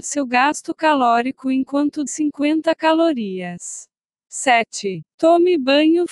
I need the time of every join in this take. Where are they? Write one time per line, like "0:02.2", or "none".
0:02.1
0:04.0